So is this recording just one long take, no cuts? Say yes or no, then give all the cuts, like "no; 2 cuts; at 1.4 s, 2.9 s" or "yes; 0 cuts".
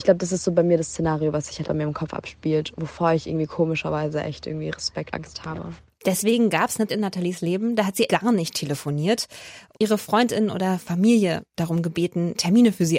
no; 6 cuts; at 1.6 s, 2.7 s, 5.1 s, 6.9 s, 8.1 s, 9.7 s